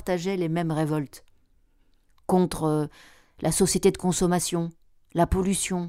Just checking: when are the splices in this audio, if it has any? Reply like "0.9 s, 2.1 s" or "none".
none